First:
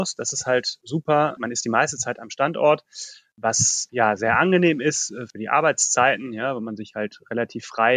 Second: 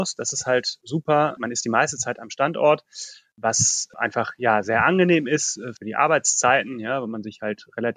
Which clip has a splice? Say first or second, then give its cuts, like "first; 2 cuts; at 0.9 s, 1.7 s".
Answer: first; 1 cut; at 3.9 s